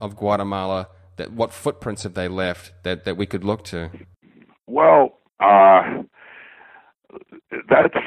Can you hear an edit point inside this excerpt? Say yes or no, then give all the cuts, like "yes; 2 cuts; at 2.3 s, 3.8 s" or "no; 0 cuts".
yes; 1 cut; at 5.3 s